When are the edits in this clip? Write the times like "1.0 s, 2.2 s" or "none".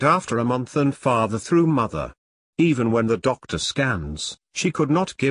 none